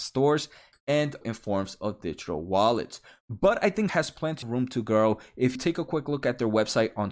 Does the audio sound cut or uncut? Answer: cut